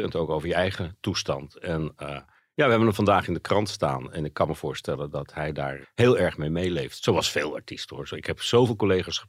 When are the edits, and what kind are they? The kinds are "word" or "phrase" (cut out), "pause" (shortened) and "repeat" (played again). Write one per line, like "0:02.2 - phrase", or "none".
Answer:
0:05.8 - word